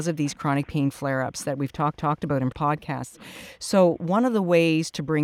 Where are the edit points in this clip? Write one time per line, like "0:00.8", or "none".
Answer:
0:02.0
0:02.5